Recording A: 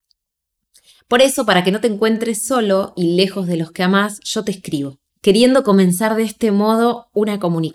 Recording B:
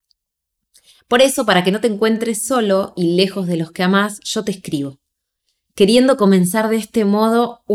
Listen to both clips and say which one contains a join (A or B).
A